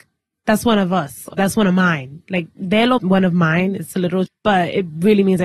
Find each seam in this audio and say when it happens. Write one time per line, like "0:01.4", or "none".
0:01.3
0:03.0
0:04.3